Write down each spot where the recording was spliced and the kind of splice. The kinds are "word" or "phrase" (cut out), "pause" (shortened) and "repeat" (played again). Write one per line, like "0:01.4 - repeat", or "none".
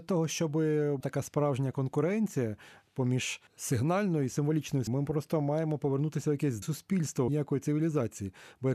0:01.0 - word
0:03.5 - pause
0:04.9 - word
0:06.6 - word
0:07.3 - phrase